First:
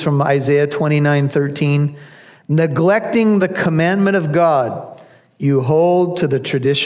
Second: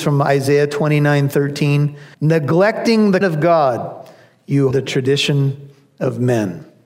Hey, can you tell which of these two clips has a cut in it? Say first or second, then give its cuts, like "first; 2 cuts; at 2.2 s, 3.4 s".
second; 3 cuts; at 2.1 s, 3.2 s, 4.7 s